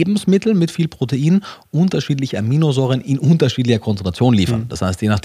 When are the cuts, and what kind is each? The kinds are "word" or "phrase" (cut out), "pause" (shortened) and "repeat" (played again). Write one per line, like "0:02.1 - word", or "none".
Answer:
none